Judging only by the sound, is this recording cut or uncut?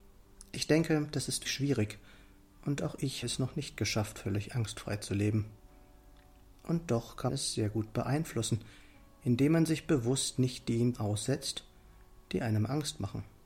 cut